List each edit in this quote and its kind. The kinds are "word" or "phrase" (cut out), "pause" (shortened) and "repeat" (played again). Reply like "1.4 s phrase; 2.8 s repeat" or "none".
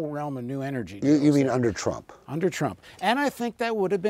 none